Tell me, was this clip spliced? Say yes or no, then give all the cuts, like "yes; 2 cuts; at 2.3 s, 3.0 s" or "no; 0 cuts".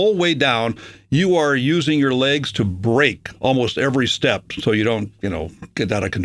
no; 0 cuts